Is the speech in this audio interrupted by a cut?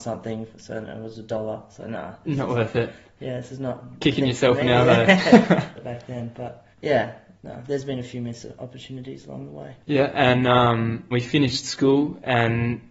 yes; 5 cuts; at 1.8 s, 5.8 s, 6.7 s, 9.8 s, 11.1 s

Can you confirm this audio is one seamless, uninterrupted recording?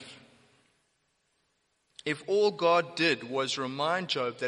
yes; 0 cuts

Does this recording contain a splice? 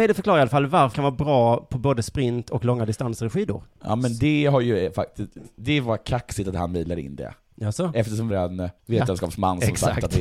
yes; 4 cuts; at 0.9 s, 3.7 s, 8.3 s, 8.8 s

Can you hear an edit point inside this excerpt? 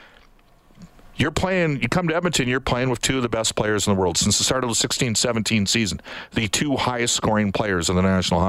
no; 0 cuts

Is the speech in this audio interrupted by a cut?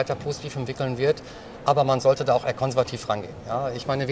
no; 0 cuts

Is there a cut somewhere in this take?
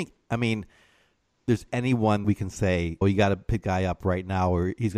yes; 3 cuts; at 2.2 s, 3.0 s, 3.6 s

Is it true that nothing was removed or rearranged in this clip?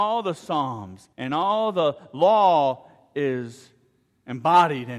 no; 1 cut; at 1.1 s

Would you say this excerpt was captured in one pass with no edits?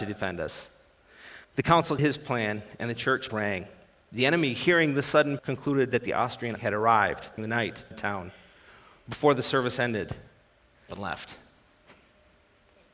no; 8 cuts; at 1.4 s, 2.0 s, 3.3 s, 5.4 s, 6.6 s, 7.4 s, 7.9 s, 10.9 s

